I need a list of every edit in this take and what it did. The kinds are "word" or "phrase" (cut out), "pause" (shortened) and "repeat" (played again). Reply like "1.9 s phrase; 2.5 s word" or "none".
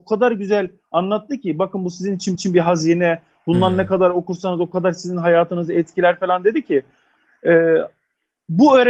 2.3 s repeat